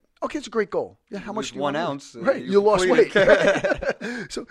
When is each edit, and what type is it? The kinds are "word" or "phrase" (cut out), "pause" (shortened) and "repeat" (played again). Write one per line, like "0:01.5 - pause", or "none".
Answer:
0:02.4 - word